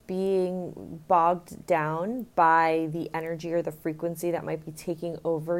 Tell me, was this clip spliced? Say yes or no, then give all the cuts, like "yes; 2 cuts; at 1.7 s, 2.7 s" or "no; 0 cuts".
no; 0 cuts